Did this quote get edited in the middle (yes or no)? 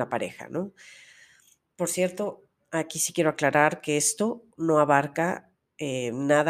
no